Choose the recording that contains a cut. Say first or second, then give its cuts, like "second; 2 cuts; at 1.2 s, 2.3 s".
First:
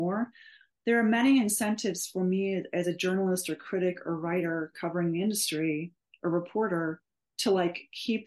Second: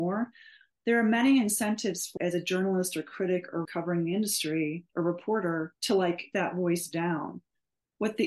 second; 5 cuts; at 2.2 s, 3.6 s, 4.9 s, 5.8 s, 6.3 s